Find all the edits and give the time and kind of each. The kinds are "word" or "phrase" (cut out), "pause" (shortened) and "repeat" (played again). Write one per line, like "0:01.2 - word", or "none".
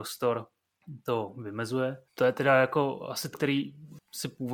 0:02.1 - pause
0:03.3 - word